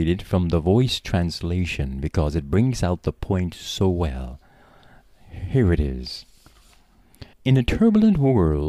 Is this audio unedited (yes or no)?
no